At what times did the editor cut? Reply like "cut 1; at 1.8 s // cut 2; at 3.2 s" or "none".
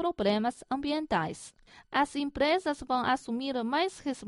none